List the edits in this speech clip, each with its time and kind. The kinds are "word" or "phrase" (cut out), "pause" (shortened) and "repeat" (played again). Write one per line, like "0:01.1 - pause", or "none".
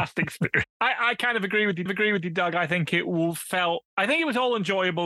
0:01.9 - repeat
0:03.9 - pause